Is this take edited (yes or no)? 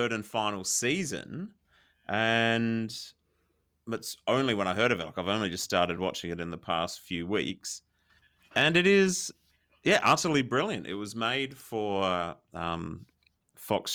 no